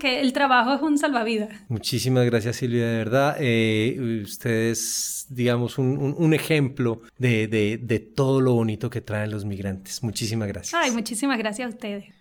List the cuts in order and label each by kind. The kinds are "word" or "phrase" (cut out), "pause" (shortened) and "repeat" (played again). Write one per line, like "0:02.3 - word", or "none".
0:07.1 - pause